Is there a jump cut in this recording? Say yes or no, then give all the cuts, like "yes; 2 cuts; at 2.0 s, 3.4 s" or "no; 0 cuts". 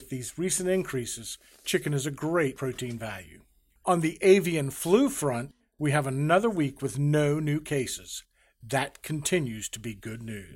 no; 0 cuts